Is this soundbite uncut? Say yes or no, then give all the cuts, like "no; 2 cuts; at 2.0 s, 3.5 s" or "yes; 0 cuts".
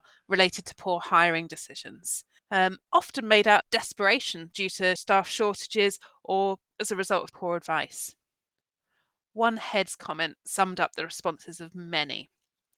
no; 4 cuts; at 2.4 s, 3.6 s, 5.0 s, 7.3 s